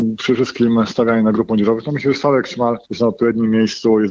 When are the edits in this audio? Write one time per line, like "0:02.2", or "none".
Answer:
0:02.8